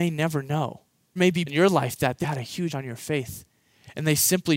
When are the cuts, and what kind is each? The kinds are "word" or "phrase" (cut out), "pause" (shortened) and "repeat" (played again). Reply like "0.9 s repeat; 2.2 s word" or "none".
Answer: 1.2 s word; 1.5 s word; 2.2 s word; 2.7 s word

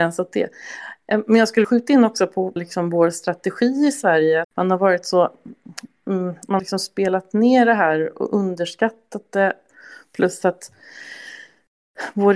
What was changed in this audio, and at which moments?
1.6 s word; 2.6 s word; 4.4 s word; 6.6 s word

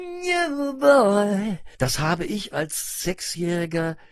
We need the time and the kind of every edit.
1.7 s pause; 2.5 s word

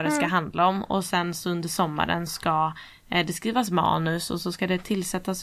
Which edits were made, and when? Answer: 2.3 s word

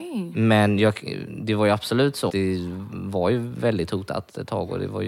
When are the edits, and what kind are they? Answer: 2.3 s word

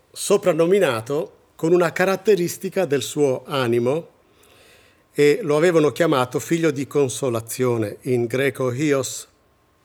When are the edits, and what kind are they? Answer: none

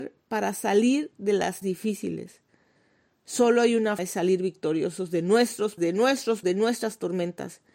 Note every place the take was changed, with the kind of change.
1.6 s word; 4.0 s word; 5.8 s word; 6.4 s word

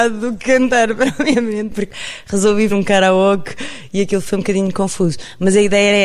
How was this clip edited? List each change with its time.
2.7 s word

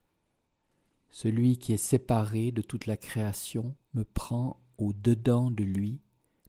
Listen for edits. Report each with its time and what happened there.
3.8 s pause

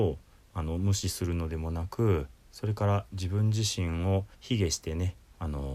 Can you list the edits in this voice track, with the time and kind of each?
4.3 s pause

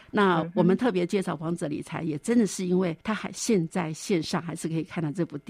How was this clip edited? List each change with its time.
3.0 s pause

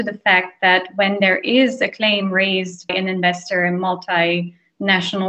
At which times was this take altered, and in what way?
2.9 s word

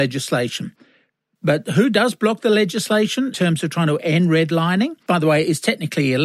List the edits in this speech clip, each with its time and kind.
3.3 s word; 5.1 s word

